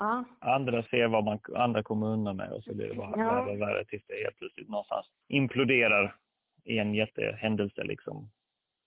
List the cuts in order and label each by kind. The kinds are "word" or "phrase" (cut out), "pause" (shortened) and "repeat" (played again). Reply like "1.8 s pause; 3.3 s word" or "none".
5.1 s pause